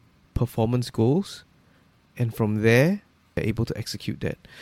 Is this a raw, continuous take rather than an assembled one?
yes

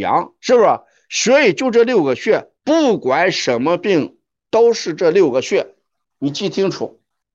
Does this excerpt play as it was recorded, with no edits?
no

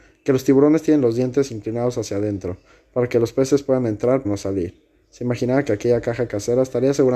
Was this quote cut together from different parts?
yes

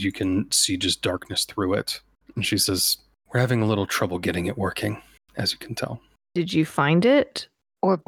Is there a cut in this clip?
no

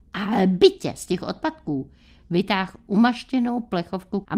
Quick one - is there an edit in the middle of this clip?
no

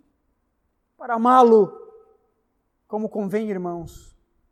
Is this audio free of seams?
yes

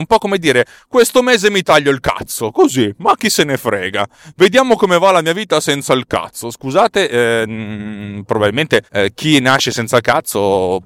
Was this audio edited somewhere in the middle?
yes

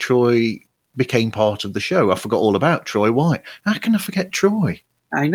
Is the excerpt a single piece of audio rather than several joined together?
yes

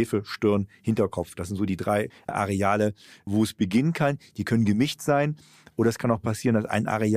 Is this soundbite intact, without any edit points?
yes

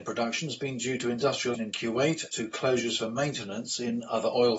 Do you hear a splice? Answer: yes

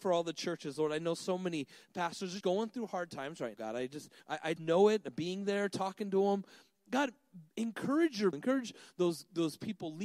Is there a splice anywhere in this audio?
yes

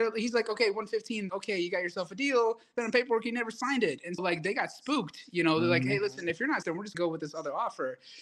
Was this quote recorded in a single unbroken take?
no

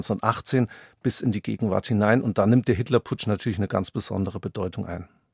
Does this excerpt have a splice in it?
no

